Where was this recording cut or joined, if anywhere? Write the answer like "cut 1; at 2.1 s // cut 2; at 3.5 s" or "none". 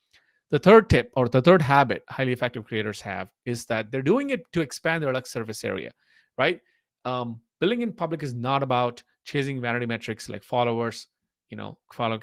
none

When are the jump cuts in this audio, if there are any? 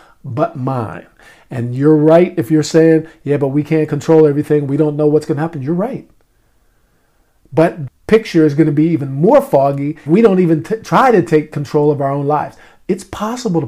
cut 1; at 7.9 s // cut 2; at 10.1 s

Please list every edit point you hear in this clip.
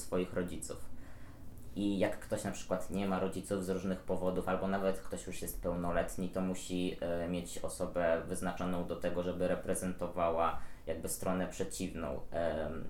none

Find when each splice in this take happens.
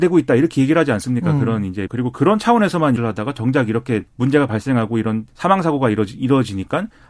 cut 1; at 1.9 s // cut 2; at 3.0 s // cut 3; at 4.1 s // cut 4; at 5.3 s

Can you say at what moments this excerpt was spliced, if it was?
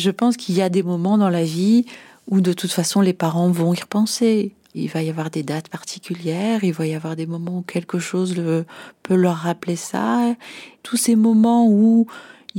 none

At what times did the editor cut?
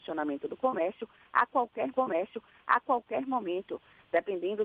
cut 1; at 1.9 s

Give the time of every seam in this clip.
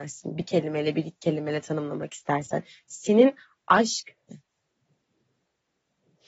cut 1; at 4.3 s

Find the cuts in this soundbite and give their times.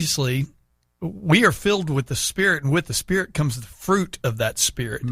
none

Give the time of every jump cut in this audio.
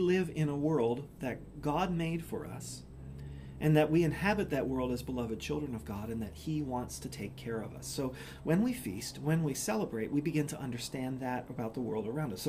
none

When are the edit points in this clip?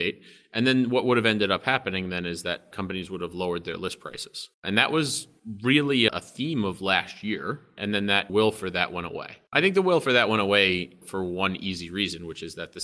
cut 1; at 4.5 s

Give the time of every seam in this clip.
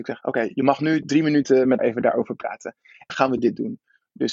cut 1; at 1.8 s // cut 2; at 3.1 s

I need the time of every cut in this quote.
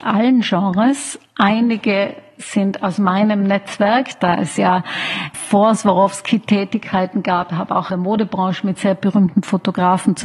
cut 1; at 5.3 s // cut 2; at 7.9 s

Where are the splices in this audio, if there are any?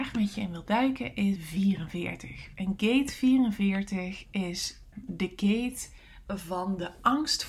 cut 1; at 1.4 s // cut 2; at 4.9 s

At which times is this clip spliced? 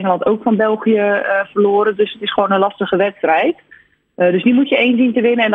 none

